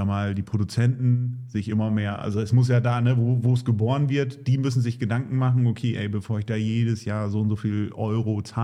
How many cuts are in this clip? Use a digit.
0